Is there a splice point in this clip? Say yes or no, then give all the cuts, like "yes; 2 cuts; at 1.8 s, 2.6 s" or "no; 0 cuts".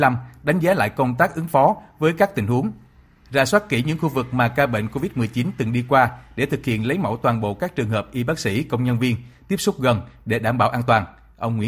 no; 0 cuts